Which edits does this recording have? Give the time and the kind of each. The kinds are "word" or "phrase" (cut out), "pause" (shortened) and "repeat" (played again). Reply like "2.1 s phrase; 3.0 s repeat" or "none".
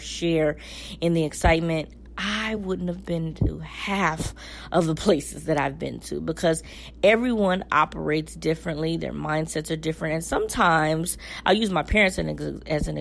none